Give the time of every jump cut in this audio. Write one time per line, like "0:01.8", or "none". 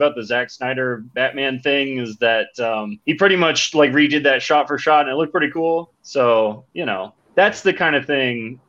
0:01.1
0:03.0
0:05.9
0:07.2

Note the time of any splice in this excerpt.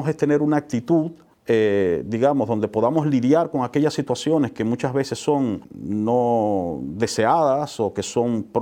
0:01.3
0:05.6

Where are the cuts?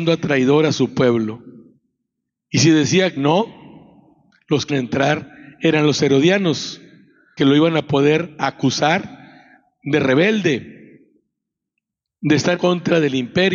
0:03.2
0:04.7
0:07.4
0:12.6

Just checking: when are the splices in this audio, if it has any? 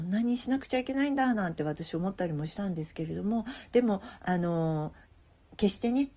none

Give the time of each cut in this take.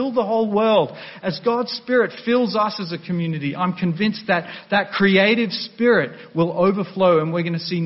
none

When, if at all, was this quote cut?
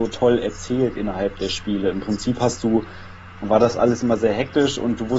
0:03.4

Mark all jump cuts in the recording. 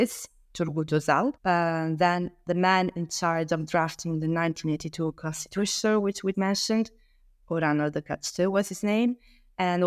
0:01.4
0:06.3

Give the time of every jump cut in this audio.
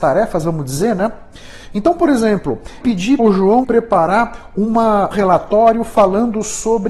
0:02.8
0:03.2
0:03.6
0:05.1

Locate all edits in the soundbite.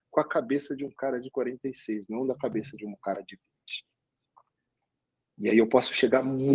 none

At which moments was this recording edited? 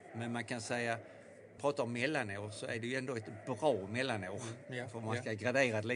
0:01.6

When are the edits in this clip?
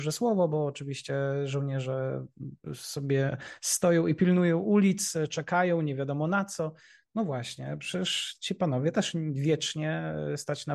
none

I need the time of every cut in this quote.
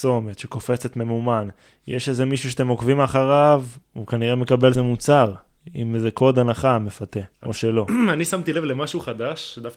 0:01.7
0:04.7
0:07.3

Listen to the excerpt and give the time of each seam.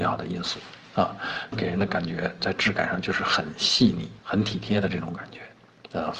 0:01.5
0:04.2

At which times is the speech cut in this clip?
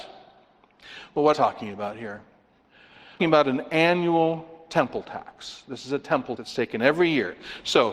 0:01.3
0:03.2
0:06.4

